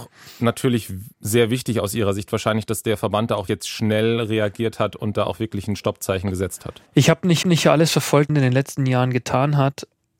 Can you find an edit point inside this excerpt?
yes; 5 cuts; at 1.1 s, 3.5 s, 6.9 s, 7.4 s, 8.3 s

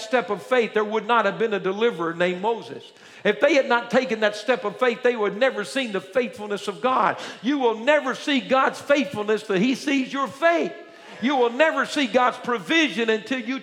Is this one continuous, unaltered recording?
yes; 0 cuts

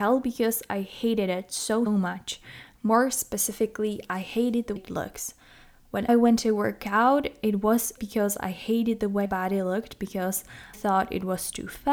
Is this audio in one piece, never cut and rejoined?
no; 6 cuts; at 1.9 s, 4.8 s, 6.1 s, 8.0 s, 9.2 s, 10.7 s

